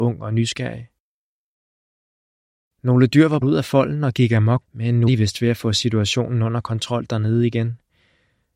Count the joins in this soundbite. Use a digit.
3